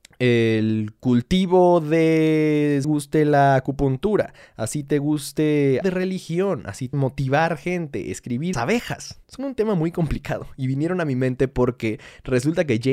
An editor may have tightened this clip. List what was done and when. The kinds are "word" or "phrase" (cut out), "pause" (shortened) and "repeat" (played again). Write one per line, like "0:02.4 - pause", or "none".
0:02.8 - phrase
0:05.8 - word
0:06.9 - word
0:08.5 - phrase
0:09.2 - pause